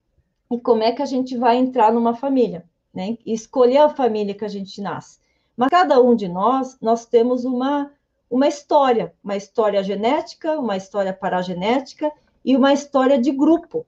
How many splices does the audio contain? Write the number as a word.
zero